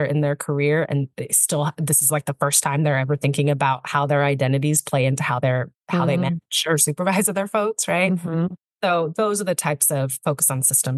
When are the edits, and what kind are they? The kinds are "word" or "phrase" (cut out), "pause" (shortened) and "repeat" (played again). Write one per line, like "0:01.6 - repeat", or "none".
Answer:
0:05.8 - pause